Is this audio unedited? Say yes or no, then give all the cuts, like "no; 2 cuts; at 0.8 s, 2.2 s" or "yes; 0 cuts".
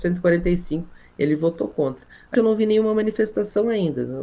no; 1 cut; at 2.3 s